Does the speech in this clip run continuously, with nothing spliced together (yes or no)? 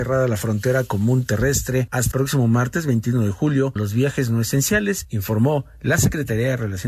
no